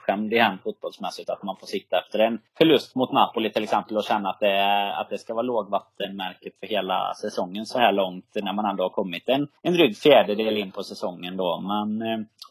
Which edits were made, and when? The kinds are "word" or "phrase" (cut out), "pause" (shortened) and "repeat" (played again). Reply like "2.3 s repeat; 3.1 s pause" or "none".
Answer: 2.5 s pause; 9.6 s pause